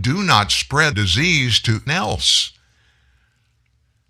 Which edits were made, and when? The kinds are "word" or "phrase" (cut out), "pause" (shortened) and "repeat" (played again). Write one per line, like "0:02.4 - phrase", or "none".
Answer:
0:00.9 - word
0:01.9 - word